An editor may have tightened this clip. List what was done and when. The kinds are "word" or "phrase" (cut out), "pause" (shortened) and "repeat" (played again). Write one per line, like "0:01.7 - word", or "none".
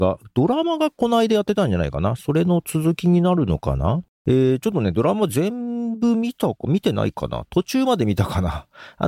0:04.1 - pause